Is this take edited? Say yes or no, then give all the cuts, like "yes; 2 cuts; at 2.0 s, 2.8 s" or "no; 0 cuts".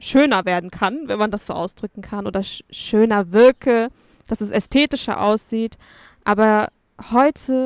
no; 0 cuts